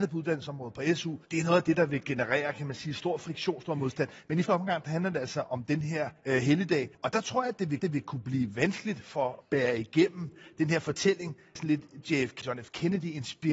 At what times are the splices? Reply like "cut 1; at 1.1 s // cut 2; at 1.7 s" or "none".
cut 1; at 1.2 s // cut 2; at 4.5 s // cut 3; at 6.2 s // cut 4; at 6.9 s // cut 5; at 7.8 s // cut 6; at 9.4 s // cut 7; at 11.6 s // cut 8; at 12.4 s